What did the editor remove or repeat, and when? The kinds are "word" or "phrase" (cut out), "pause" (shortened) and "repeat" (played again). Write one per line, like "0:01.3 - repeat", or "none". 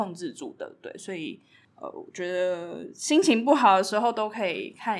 none

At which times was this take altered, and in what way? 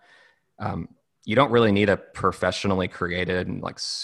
none

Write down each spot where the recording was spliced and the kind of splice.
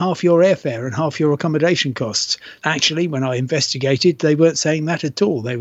0:02.6 - pause

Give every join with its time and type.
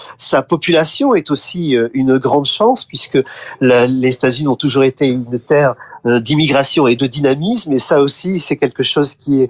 0:07.0 - word

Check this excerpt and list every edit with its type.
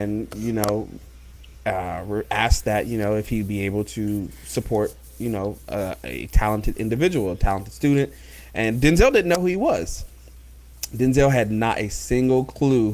none

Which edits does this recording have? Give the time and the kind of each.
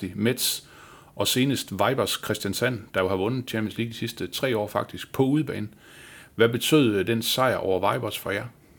none

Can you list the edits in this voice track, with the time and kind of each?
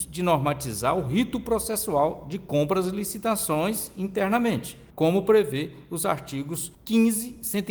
0:04.9 - pause
0:06.7 - pause

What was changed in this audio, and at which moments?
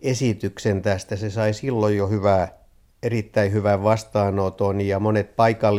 none

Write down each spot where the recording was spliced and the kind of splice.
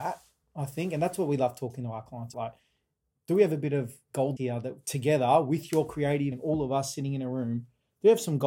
0:02.3 - word
0:04.4 - word
0:06.3 - word

